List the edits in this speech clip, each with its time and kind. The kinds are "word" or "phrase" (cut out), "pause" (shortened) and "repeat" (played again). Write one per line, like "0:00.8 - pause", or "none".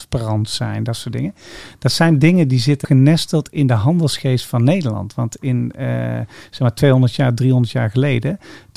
0:02.8 - word